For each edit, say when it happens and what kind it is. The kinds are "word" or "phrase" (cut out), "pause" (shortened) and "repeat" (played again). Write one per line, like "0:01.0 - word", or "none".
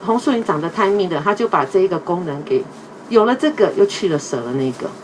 none